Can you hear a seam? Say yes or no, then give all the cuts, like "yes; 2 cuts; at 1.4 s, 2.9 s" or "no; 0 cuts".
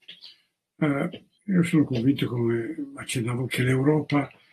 yes; 2 cuts; at 1.3 s, 3.5 s